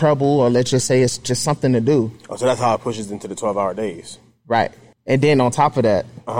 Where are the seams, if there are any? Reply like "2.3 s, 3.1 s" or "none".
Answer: none